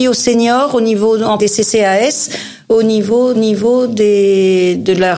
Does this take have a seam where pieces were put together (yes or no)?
yes